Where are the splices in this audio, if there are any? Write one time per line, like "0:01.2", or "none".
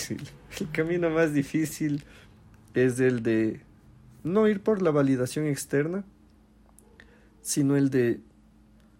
none